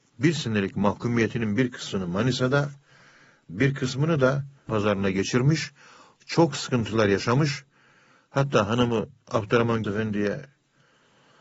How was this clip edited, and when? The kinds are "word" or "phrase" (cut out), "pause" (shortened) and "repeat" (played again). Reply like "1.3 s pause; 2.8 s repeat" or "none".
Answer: 4.7 s word; 9.8 s word